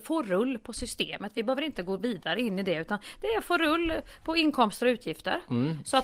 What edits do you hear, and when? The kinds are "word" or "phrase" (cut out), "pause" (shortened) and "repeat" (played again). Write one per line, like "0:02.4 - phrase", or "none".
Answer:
none